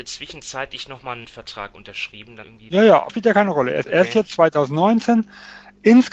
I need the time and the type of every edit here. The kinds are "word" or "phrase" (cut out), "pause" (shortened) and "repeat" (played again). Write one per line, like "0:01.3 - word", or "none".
0:01.2 - word
0:02.4 - word
0:03.1 - word
0:03.8 - word